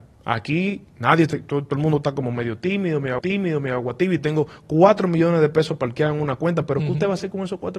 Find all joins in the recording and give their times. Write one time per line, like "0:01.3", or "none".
0:03.2